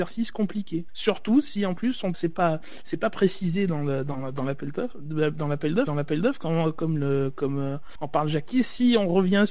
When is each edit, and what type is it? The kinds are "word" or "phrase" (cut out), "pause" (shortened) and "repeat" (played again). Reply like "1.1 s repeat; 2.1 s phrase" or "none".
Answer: 2.1 s phrase; 5.9 s repeat